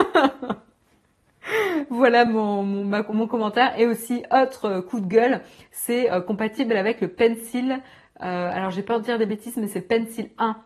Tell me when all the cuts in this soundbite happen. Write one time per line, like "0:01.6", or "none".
none